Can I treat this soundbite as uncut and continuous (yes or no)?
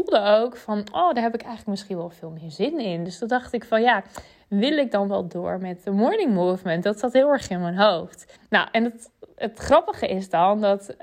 no